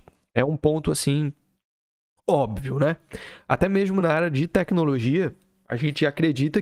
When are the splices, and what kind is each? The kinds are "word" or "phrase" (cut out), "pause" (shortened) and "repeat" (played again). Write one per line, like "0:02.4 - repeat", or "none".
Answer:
none